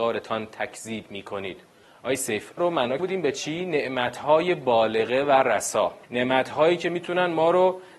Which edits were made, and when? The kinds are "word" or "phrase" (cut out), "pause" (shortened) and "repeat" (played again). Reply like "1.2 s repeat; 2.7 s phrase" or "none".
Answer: 1.8 s pause; 2.6 s word; 3.0 s word; 6.0 s pause